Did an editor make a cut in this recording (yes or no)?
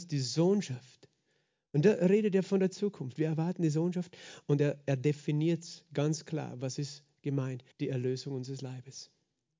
yes